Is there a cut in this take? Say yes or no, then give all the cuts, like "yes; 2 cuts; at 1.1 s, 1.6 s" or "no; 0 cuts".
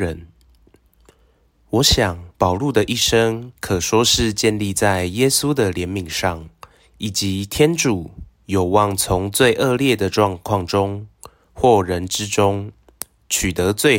yes; 3 cuts; at 2.3 s, 3.6 s, 6.7 s